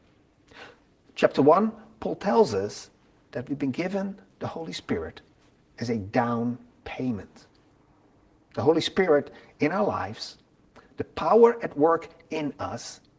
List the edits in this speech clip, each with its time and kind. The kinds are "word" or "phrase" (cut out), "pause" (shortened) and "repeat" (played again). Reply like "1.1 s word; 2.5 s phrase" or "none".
none